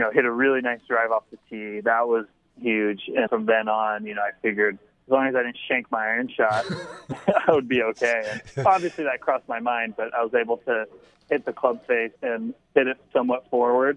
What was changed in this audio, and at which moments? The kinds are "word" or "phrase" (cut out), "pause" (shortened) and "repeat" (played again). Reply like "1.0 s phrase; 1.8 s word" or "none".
3.3 s word; 11.1 s word; 12.2 s pause